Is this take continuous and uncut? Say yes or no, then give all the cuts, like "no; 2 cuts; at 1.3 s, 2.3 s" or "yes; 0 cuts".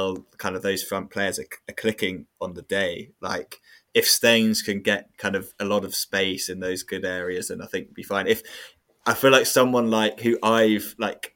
yes; 0 cuts